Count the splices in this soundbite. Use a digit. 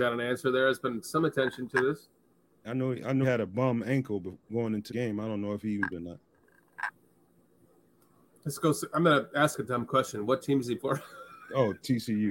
5